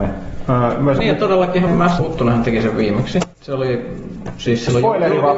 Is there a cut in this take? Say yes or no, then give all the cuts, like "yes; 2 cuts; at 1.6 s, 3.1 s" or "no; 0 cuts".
yes; 3 cuts; at 1.7 s, 2.0 s, 3.3 s